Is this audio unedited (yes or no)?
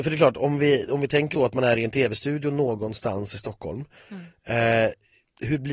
no